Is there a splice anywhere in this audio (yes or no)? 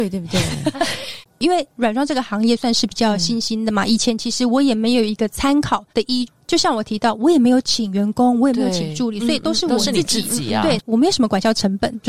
yes